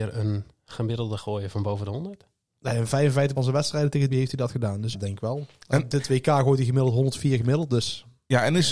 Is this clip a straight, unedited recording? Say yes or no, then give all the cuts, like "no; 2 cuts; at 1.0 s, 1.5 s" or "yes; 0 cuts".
no; 4 cuts; at 1.2 s, 3.4 s, 4.1 s, 4.9 s